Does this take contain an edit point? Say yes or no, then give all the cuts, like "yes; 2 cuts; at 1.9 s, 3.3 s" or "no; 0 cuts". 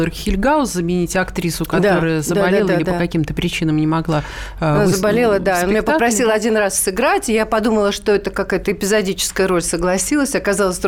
no; 0 cuts